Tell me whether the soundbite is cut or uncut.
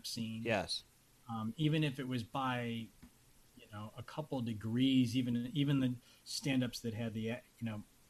uncut